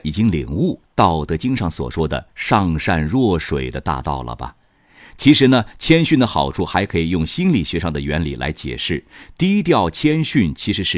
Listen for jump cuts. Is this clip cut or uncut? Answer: uncut